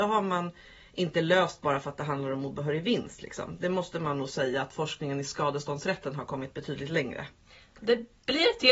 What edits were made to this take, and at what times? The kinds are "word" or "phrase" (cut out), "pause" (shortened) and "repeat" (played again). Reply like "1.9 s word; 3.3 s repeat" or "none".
none